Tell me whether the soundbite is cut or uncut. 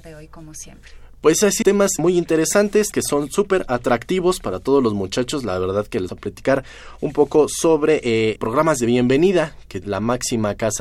cut